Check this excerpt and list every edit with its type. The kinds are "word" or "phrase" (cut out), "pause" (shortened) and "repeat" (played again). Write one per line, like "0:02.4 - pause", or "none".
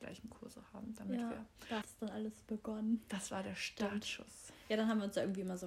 0:01.8 - word